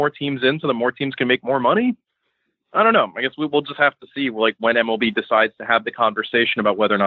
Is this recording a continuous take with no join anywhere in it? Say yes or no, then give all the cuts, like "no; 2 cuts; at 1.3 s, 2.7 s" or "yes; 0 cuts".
yes; 0 cuts